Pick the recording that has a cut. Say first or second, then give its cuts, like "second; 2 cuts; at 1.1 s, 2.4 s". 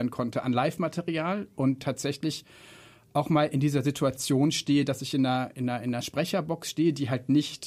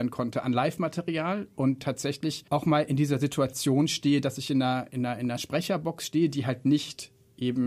second; 1 cut; at 2.5 s